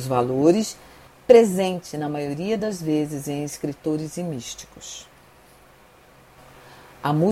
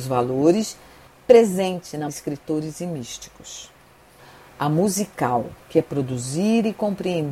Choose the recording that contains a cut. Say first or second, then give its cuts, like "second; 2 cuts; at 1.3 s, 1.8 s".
second; 3 cuts; at 2.1 s, 4.2 s, 5.6 s